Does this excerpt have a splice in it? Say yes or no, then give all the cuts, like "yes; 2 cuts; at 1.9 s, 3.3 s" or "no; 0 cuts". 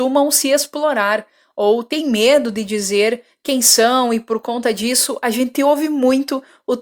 no; 0 cuts